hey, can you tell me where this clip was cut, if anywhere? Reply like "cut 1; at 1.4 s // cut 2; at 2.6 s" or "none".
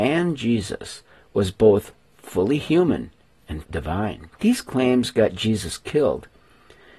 cut 1; at 3.6 s // cut 2; at 4.3 s